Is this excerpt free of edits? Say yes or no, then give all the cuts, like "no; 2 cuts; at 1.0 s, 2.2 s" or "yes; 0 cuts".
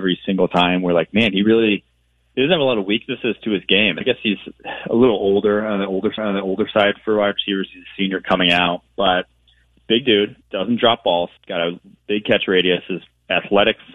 no; 4 cuts; at 4.0 s, 6.2 s, 10.4 s, 11.4 s